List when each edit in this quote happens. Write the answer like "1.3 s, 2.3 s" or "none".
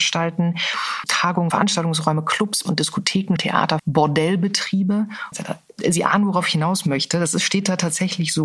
1.1 s, 1.5 s, 2.7 s, 3.4 s, 3.8 s, 5.3 s